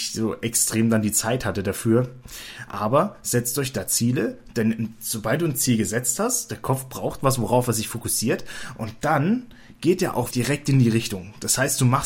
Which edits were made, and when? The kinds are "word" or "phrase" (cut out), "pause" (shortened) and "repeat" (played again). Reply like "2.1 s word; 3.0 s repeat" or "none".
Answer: 10.3 s word

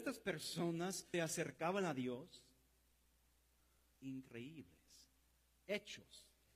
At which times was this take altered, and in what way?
1.1 s word; 3.9 s word

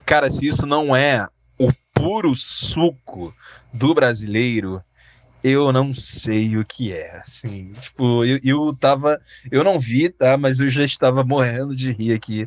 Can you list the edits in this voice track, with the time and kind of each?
none

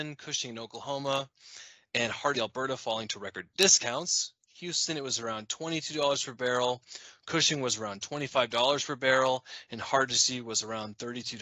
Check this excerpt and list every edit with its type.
2.3 s word

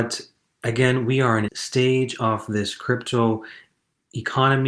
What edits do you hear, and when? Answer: 1.5 s phrase

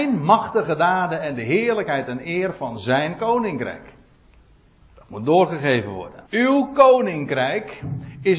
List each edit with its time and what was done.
6.3 s pause

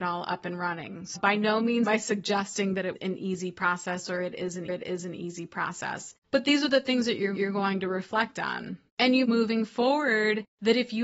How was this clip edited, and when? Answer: 1.2 s word; 1.9 s word; 3.0 s word; 4.7 s repeat; 6.2 s pause; 7.4 s repeat; 8.9 s pause; 9.2 s phrase

